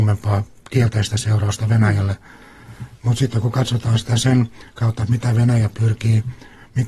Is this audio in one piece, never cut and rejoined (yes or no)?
yes